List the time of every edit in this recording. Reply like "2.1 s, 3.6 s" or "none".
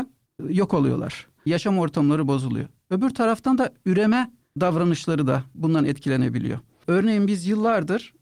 none